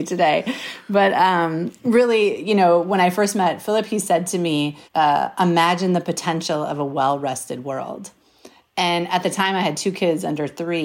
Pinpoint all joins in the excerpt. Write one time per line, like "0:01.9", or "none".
0:04.9